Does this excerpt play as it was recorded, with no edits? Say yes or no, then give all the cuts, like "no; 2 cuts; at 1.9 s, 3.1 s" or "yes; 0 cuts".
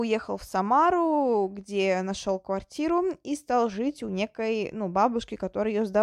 yes; 0 cuts